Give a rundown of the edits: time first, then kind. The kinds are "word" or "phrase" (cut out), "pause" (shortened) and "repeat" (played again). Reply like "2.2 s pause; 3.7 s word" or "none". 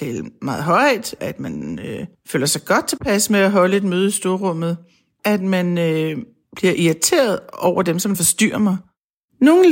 1.2 s word; 5.2 s word